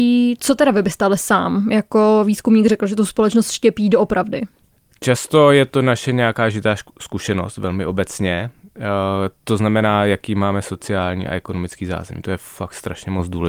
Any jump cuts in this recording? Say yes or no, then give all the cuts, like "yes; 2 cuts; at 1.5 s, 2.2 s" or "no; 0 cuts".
no; 0 cuts